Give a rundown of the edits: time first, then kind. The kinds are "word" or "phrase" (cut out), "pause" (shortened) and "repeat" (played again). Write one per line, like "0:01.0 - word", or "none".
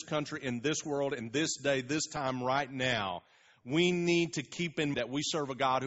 0:04.9 - word